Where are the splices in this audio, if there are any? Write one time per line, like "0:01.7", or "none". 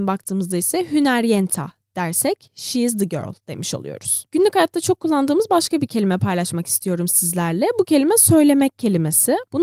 none